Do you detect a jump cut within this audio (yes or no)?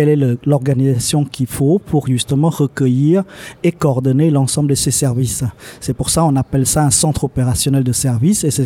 no